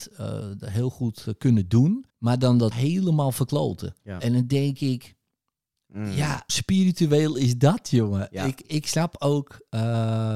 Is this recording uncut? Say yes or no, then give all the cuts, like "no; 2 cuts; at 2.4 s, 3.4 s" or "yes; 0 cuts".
no; 5 cuts; at 2.1 s, 2.7 s, 4.0 s, 6.5 s, 8.6 s